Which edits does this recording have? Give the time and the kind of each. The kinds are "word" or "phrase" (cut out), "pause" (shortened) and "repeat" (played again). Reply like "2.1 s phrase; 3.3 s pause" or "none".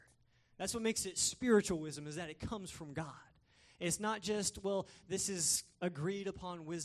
5.7 s pause